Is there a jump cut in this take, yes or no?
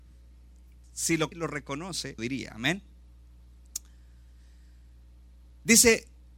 yes